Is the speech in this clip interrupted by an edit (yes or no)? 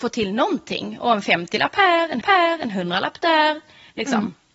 yes